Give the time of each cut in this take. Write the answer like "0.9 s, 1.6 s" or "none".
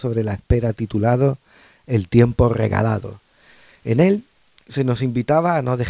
none